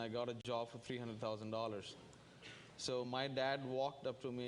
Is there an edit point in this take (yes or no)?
no